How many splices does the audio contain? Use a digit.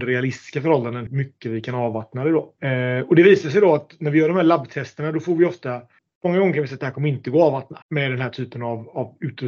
4